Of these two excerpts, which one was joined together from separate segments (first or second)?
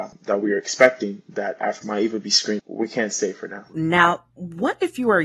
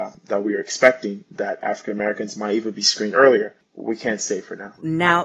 first